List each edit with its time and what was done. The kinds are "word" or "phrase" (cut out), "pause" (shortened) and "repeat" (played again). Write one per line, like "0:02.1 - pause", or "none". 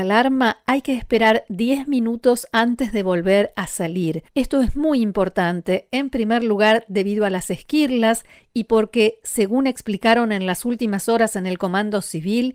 0:04.3 - pause